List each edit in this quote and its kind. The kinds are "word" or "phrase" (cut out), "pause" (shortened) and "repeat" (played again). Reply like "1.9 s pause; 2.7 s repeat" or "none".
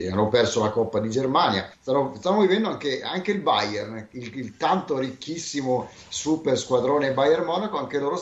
1.7 s pause